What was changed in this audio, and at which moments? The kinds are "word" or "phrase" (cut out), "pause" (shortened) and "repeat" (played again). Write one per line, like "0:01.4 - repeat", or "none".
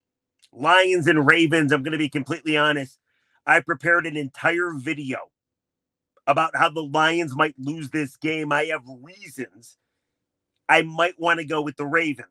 none